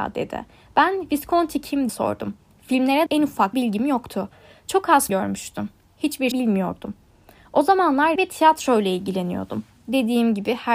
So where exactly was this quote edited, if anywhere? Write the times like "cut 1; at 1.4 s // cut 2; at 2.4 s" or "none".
cut 1; at 1.9 s // cut 2; at 3.1 s // cut 3; at 3.5 s // cut 4; at 5.1 s // cut 5; at 6.3 s // cut 6; at 8.2 s